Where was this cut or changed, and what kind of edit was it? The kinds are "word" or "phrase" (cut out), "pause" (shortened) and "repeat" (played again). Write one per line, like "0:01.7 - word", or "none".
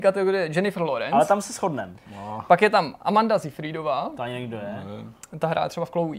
none